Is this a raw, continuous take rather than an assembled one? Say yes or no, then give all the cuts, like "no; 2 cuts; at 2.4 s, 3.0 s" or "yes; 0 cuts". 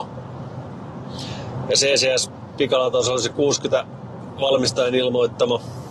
yes; 0 cuts